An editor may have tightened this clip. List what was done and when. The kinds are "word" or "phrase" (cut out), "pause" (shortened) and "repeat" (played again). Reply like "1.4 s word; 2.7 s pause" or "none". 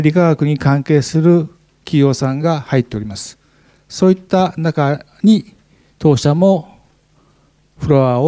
none